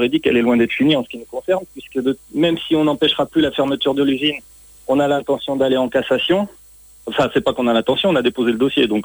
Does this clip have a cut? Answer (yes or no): no